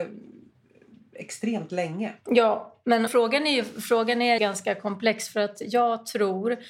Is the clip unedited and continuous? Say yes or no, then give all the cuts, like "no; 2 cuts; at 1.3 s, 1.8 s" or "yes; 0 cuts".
no; 2 cuts; at 3.1 s, 4.4 s